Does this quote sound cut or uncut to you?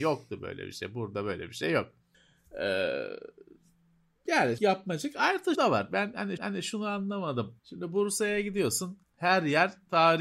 cut